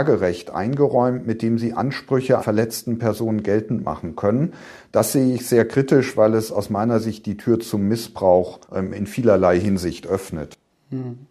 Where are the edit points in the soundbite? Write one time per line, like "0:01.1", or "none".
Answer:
0:02.4
0:08.6